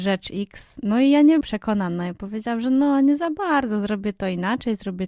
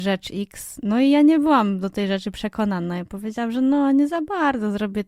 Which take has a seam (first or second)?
first